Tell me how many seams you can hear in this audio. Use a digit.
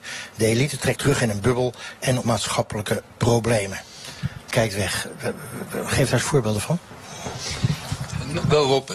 3